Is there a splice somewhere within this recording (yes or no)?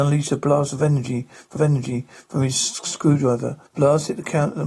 yes